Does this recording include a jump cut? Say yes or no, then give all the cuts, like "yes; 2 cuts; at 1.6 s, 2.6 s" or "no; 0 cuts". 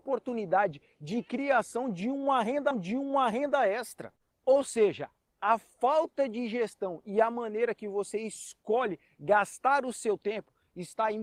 yes; 1 cut; at 2.7 s